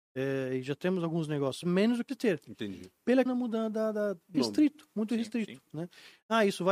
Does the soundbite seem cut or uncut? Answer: cut